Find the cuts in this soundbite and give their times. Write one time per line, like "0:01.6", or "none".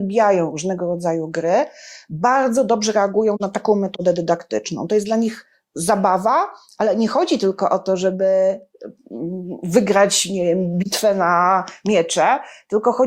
none